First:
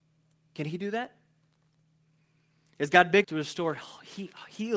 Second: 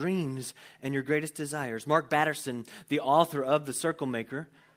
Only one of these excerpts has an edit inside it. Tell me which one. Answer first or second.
first